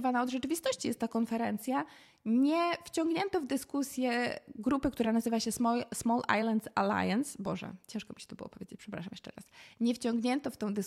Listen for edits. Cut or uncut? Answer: uncut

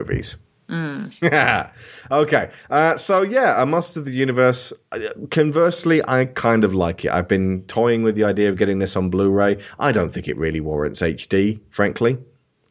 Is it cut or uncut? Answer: uncut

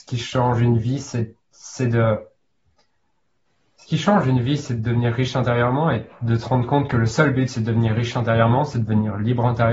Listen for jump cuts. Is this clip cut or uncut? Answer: uncut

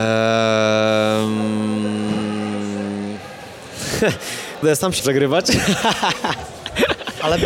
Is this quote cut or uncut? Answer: cut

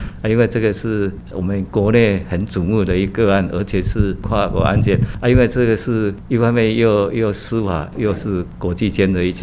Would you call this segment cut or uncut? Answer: cut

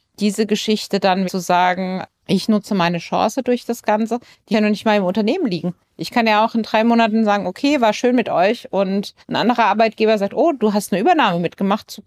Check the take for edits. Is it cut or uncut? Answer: cut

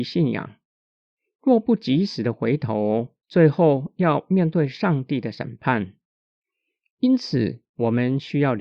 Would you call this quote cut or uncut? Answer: cut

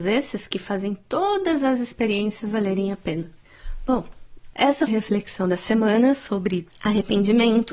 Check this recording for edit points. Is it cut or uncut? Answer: cut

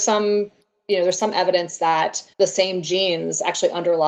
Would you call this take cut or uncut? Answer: cut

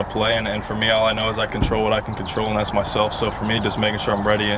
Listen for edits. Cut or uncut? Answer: cut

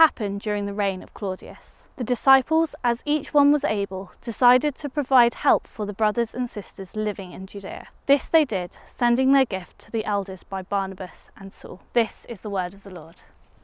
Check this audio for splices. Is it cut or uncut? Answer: cut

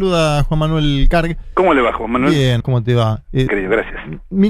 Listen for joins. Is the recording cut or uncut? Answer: cut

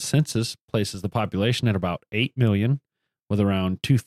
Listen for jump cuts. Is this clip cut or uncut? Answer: uncut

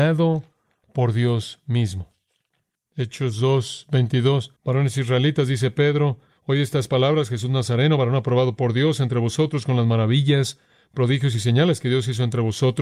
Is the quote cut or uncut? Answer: cut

